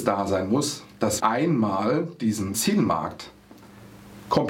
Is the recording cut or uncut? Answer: cut